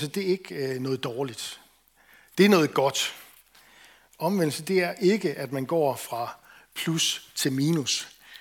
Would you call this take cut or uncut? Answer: uncut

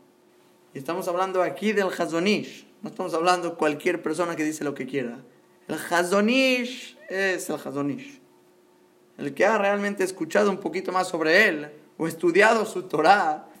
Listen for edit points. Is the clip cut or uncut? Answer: uncut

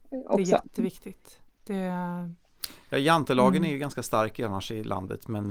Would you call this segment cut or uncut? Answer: uncut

